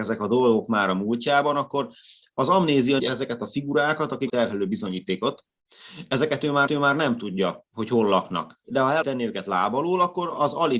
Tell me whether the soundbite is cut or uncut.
cut